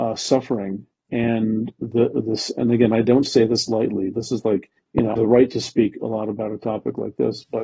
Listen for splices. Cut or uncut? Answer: cut